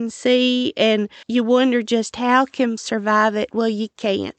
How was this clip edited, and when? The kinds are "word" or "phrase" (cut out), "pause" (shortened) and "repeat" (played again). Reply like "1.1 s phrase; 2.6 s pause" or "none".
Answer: 1.2 s word; 2.8 s word